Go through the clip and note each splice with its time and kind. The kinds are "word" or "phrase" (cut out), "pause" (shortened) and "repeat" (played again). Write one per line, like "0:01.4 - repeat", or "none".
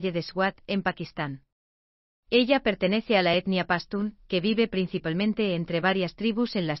none